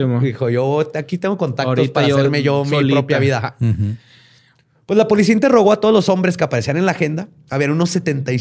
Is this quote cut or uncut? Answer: uncut